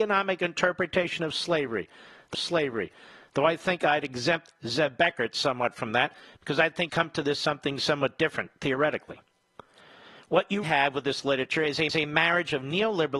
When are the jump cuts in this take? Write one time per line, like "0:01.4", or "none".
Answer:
0:02.3
0:06.9
0:10.6
0:11.9